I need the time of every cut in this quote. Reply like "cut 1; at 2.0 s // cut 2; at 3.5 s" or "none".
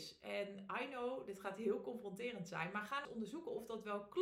cut 1; at 3.0 s